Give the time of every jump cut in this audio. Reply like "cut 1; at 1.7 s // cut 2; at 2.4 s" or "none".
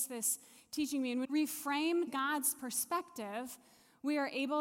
cut 1; at 1.2 s // cut 2; at 2.1 s